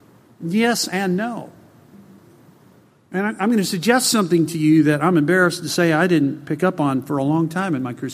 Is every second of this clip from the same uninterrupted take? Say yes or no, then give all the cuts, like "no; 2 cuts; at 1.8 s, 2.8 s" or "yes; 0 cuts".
yes; 0 cuts